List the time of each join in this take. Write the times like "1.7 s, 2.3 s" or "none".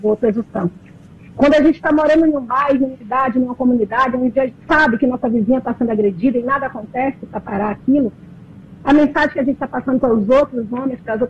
2.9 s, 4.5 s

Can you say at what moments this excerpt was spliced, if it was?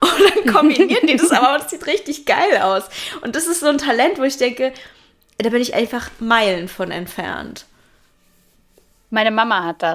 none

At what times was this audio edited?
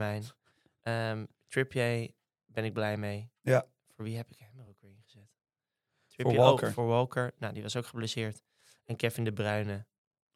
none

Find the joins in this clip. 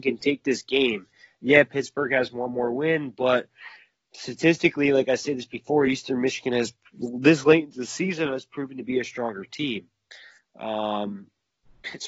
none

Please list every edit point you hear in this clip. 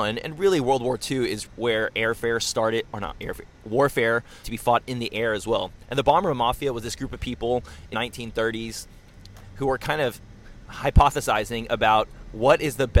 1.5 s, 4.4 s, 7.9 s

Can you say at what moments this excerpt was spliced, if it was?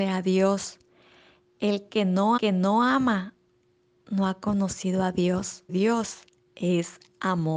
2.4 s, 5.7 s

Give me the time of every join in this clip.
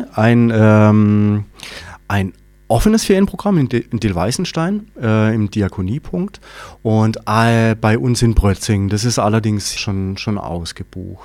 2.0 s, 9.8 s

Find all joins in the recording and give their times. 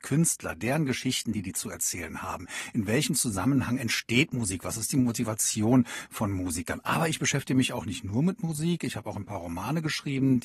none

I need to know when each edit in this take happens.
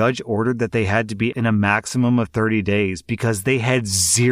1.3 s

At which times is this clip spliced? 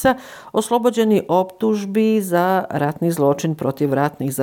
none

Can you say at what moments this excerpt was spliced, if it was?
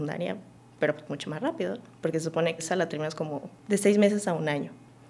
2.6 s, 3.6 s

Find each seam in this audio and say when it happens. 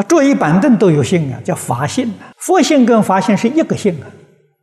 2.3 s

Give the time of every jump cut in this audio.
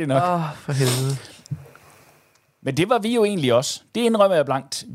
none

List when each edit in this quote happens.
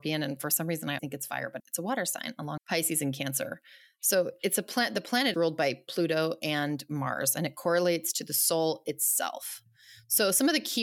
1.0 s, 1.6 s, 2.6 s, 5.3 s

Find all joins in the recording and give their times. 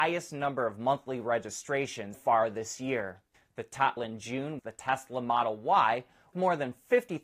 2.1 s, 3.3 s, 4.0 s, 4.6 s, 6.3 s

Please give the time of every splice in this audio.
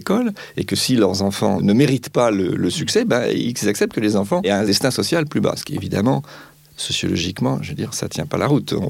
none

